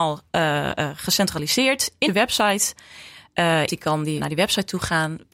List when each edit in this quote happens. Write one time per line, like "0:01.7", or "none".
0:02.1
0:03.7
0:04.2